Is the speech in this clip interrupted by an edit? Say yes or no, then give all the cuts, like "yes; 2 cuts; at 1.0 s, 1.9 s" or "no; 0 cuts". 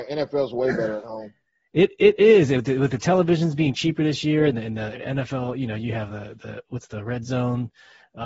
no; 0 cuts